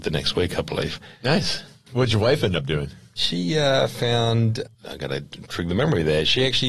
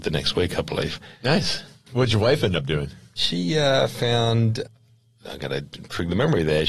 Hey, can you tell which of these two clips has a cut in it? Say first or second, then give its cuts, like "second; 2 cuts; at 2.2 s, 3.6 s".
first; 1 cut; at 4.7 s